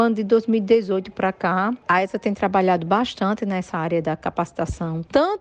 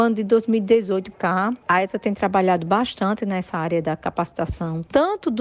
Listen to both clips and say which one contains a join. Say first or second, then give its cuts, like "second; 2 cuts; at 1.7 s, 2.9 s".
second; 1 cut; at 1.1 s